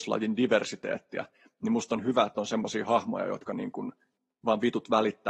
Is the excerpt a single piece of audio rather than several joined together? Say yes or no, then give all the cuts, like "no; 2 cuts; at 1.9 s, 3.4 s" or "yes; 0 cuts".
yes; 0 cuts